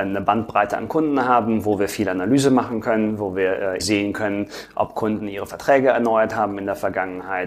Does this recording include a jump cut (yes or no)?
yes